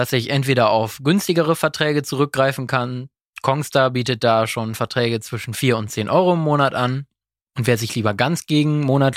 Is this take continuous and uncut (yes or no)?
yes